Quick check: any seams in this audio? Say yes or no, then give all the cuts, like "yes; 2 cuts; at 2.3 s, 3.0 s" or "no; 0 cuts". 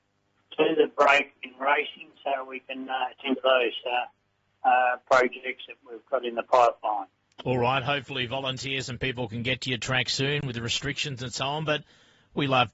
no; 0 cuts